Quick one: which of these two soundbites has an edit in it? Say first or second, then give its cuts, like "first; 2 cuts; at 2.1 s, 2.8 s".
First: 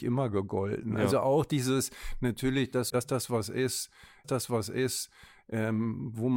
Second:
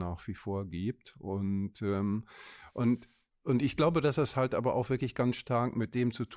first; 2 cuts; at 2.9 s, 4.2 s